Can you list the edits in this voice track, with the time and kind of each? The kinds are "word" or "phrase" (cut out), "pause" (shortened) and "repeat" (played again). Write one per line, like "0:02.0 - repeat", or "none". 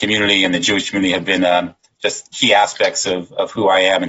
none